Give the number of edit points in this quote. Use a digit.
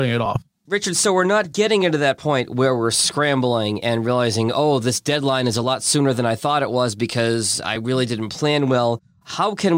0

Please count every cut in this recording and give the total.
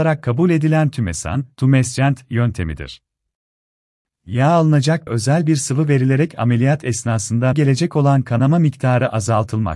2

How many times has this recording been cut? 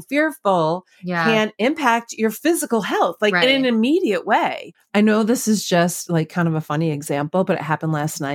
0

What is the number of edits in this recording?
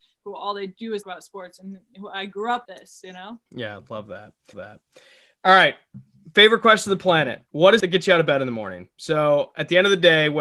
7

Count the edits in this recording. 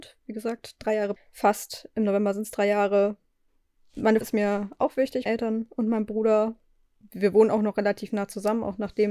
3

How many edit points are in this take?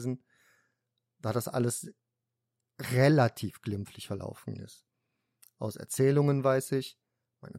0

